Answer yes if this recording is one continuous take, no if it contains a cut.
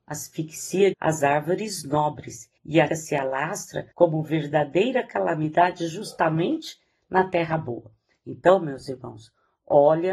no